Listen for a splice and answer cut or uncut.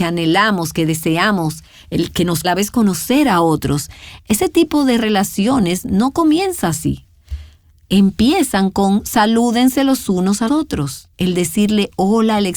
cut